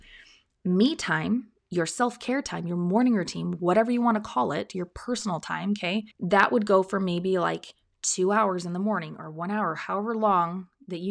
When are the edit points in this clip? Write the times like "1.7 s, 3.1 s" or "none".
6.1 s